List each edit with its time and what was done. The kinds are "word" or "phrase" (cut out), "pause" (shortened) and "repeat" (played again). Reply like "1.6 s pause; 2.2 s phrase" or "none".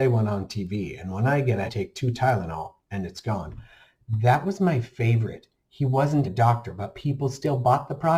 1.7 s phrase; 2.8 s pause; 6.2 s word